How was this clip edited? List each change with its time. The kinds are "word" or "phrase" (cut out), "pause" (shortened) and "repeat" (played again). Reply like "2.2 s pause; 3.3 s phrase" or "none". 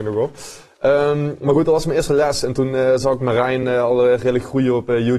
none